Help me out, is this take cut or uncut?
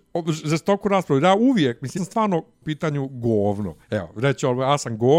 cut